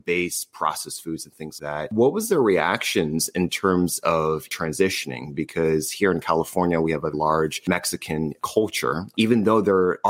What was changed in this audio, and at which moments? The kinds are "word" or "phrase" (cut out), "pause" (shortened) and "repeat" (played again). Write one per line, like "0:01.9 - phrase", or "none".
0:01.6 - word
0:07.1 - word